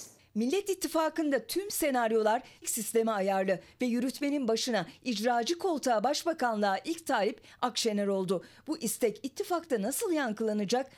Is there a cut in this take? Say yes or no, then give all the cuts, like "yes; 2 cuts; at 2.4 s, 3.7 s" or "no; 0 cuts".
yes; 1 cut; at 2.6 s